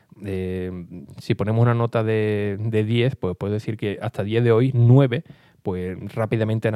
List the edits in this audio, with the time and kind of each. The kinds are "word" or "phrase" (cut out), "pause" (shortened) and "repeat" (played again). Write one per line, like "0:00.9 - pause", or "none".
none